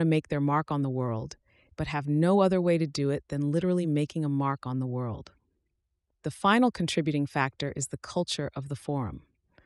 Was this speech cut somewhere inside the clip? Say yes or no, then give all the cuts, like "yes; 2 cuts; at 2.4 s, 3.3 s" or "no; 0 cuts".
no; 0 cuts